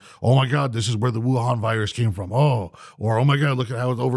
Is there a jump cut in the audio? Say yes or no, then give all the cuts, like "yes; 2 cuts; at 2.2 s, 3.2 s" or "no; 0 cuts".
no; 0 cuts